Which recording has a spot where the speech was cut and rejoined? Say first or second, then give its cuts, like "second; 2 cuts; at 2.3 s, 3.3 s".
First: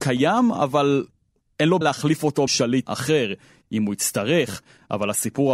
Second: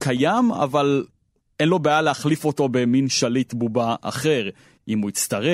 first; 3 cuts; at 1.8 s, 2.5 s, 2.8 s